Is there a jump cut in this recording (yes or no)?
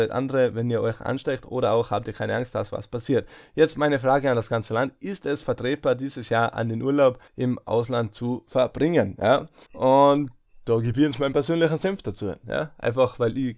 yes